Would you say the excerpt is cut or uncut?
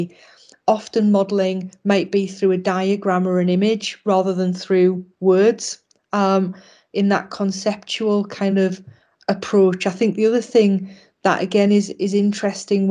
uncut